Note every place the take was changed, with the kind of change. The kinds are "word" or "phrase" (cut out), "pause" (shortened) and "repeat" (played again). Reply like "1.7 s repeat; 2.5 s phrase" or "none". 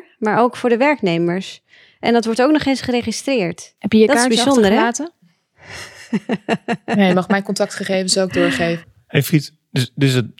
none